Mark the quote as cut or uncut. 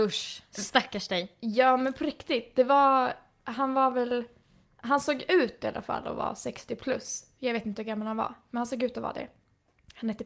uncut